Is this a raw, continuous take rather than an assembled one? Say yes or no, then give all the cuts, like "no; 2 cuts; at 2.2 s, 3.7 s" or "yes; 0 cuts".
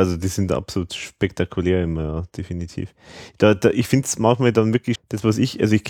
no; 1 cut; at 5.0 s